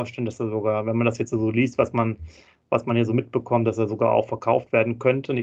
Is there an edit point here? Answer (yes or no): no